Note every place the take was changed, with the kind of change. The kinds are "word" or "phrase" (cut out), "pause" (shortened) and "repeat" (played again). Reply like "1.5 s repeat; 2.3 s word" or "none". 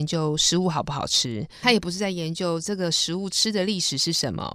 1.6 s word